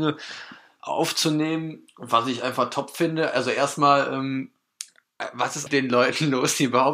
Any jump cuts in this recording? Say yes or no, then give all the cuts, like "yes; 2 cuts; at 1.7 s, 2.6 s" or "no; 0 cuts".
yes; 1 cut; at 5.7 s